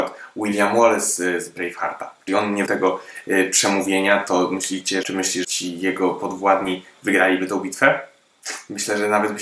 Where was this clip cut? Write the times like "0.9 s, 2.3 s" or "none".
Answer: 2.3 s, 2.7 s, 5.0 s, 5.4 s